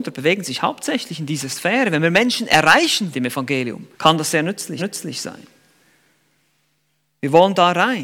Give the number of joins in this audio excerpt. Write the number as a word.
three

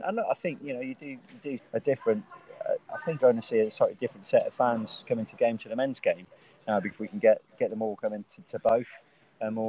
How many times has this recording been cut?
five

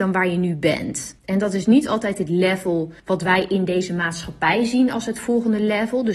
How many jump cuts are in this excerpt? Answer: two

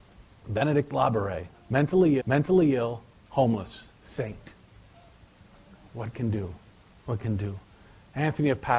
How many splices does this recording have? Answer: four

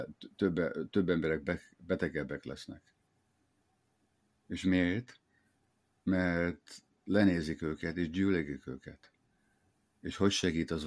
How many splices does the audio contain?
zero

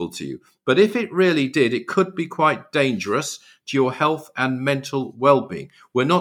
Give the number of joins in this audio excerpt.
zero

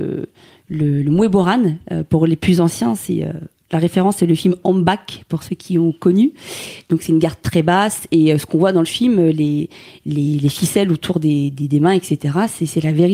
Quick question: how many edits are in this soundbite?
zero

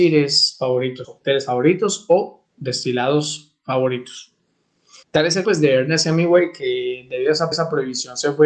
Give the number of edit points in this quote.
five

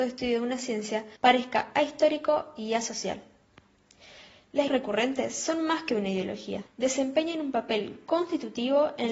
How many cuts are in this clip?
three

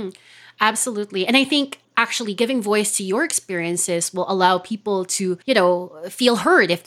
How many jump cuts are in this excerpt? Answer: two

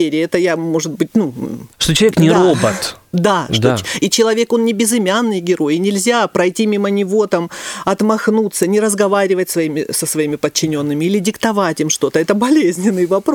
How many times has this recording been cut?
one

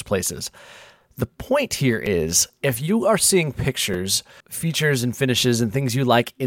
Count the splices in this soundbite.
one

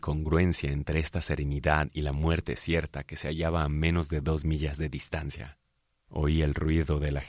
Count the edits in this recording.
zero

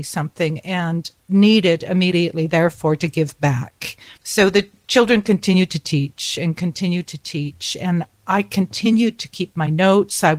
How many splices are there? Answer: two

